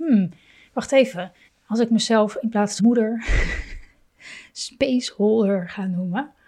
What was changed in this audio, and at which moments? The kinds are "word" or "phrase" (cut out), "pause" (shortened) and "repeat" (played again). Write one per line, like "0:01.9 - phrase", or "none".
0:01.5 - pause
0:02.8 - word